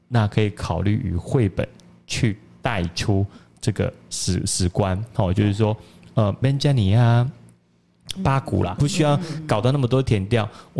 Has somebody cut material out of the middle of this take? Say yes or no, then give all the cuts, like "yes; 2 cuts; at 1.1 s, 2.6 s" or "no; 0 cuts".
yes; 2 cuts; at 6.4 s, 8.8 s